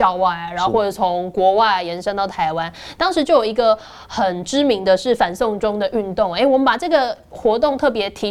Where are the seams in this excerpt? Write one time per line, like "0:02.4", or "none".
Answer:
none